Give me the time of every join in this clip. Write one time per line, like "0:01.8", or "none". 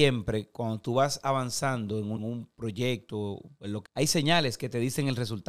0:02.2
0:03.9